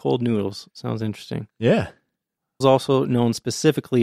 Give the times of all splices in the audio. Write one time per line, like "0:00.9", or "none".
0:02.6